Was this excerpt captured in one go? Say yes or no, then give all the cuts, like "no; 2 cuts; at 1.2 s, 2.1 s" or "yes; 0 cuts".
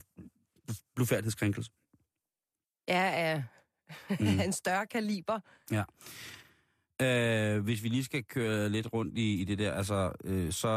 yes; 0 cuts